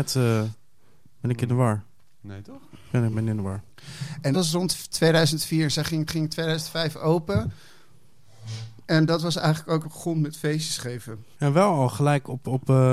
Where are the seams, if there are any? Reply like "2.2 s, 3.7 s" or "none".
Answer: 3.1 s, 4.3 s, 6.1 s, 8.8 s, 9.8 s, 11.3 s